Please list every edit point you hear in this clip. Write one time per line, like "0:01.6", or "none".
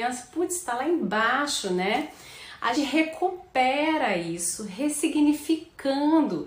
0:02.7

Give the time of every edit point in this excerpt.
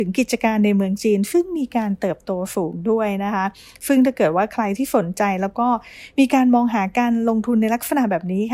none

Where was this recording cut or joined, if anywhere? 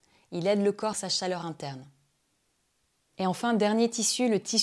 0:00.9

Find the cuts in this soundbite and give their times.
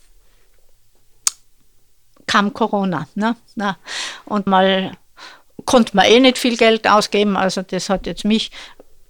0:04.5

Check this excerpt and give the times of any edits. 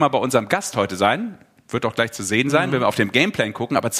none

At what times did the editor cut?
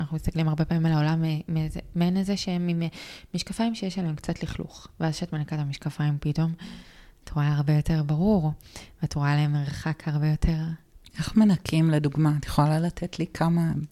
none

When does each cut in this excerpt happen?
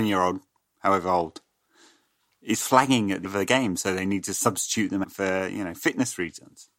0:03.2
0:05.0

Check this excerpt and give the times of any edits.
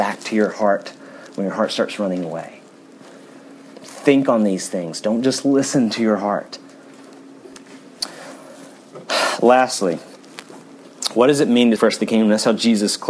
0:07.8
0:11.8

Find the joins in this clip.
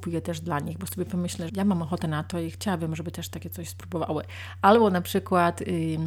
0:01.5

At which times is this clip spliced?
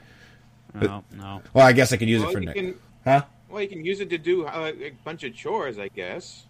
0:01.5
0:02.9

